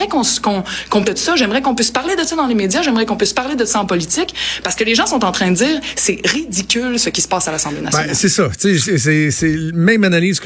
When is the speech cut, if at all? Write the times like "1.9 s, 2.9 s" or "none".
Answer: 1.0 s